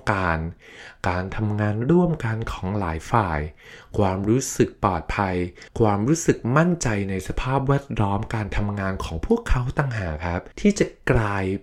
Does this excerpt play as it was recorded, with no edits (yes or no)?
no